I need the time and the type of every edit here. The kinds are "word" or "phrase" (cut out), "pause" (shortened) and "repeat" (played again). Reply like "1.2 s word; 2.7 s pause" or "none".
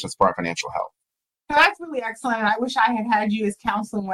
1.1 s pause